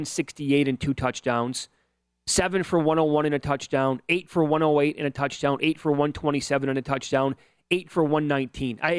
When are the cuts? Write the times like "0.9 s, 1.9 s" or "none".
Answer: none